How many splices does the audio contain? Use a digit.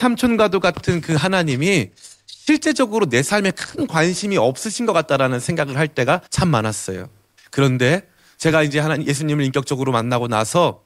2